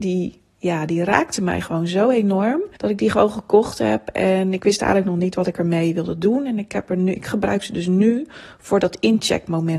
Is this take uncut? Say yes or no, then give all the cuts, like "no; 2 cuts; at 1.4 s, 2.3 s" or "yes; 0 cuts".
no; 1 cut; at 2.7 s